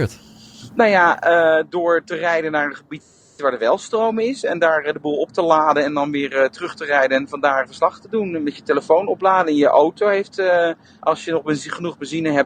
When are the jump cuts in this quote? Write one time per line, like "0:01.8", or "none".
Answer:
none